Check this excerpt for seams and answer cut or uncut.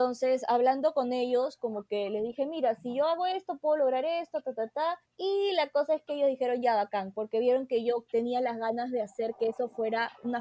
cut